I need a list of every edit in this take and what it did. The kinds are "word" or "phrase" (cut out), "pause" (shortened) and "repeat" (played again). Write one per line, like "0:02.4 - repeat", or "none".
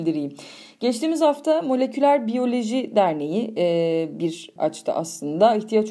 0:04.6 - word